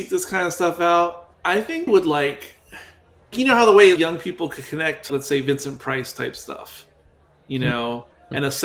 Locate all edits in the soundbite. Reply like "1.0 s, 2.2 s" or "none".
1.3 s, 1.9 s, 3.3 s, 4.0 s, 5.1 s